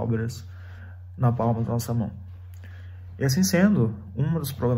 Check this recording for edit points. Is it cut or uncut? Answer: uncut